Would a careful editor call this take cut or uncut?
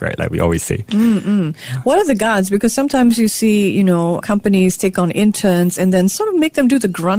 uncut